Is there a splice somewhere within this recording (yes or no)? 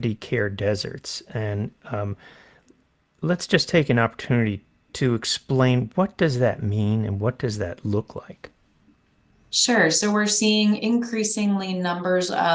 no